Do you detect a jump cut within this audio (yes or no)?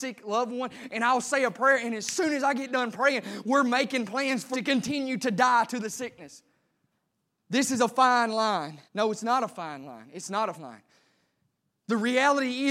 yes